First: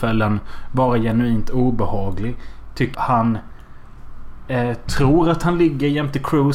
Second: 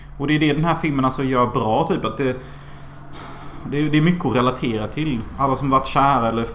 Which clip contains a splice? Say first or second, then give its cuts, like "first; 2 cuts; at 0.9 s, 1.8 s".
first; 1 cut; at 2.9 s